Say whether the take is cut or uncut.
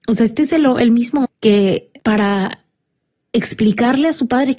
cut